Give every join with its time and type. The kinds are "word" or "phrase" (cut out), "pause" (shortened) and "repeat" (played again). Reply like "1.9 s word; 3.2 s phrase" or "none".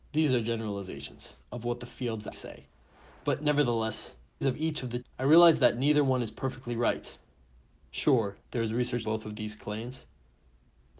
1.4 s pause; 2.3 s word; 4.4 s phrase; 5.0 s phrase; 8.4 s pause; 9.0 s word